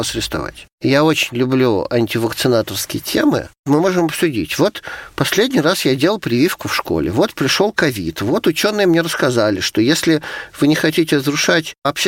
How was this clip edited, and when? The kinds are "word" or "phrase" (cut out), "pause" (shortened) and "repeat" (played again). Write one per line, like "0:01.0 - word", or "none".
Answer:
none